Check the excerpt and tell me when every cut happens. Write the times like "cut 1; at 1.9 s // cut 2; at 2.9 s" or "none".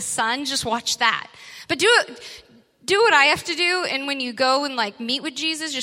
none